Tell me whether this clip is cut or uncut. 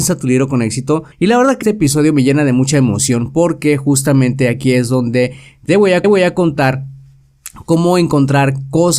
cut